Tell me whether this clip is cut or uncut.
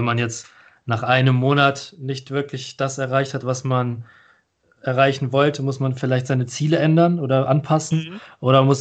uncut